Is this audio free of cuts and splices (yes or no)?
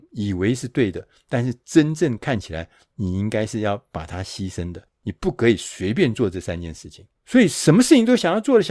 no